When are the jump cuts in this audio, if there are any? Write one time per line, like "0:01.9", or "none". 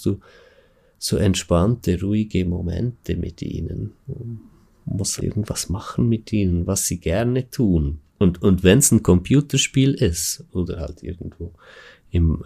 0:04.0
0:05.2
0:08.1